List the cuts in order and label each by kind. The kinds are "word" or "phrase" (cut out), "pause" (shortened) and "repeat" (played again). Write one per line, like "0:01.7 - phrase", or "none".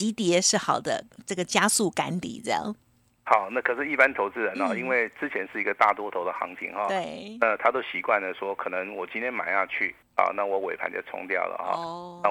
none